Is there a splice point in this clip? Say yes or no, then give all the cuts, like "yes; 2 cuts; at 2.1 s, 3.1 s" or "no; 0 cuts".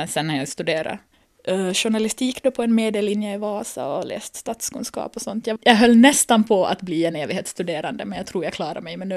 no; 0 cuts